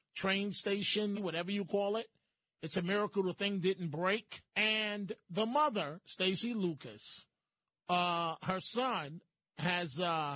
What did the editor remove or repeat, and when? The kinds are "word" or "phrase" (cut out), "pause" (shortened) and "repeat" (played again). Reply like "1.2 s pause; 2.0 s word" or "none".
1.1 s phrase; 4.5 s pause